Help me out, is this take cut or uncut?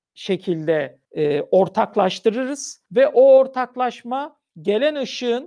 cut